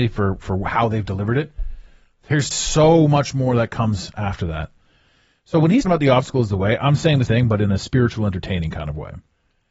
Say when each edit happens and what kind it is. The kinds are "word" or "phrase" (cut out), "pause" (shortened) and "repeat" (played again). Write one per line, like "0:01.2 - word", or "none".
0:02.5 - word
0:05.8 - word
0:07.3 - word